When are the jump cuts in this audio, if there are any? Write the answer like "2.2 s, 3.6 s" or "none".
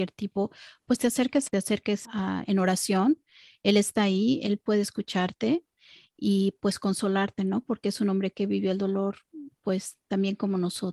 1.5 s, 2.0 s